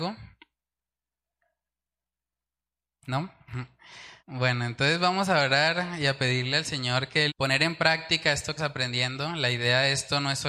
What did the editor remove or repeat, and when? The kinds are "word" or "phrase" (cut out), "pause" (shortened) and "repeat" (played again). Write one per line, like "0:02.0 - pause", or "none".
0:04.2 - pause
0:07.3 - phrase
0:08.6 - word